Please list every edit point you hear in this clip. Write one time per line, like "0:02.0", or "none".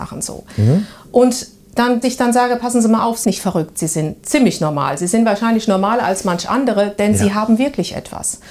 0:02.0
0:03.2